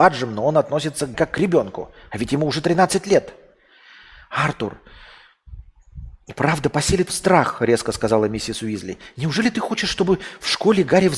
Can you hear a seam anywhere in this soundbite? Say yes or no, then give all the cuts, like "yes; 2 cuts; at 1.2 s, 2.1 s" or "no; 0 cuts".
yes; 2 cuts; at 1.1 s, 7.1 s